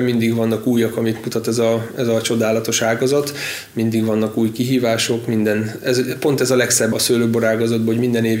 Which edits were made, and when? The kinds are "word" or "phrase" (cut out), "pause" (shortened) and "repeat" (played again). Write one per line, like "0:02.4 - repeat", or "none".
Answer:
0:06.9 - word